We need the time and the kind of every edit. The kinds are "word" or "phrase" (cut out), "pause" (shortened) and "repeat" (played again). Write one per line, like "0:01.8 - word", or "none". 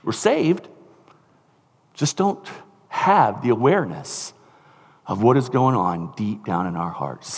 none